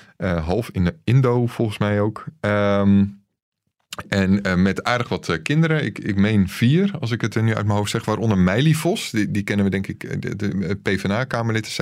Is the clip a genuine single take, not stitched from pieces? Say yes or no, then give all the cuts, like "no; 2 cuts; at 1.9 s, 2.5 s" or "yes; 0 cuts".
yes; 0 cuts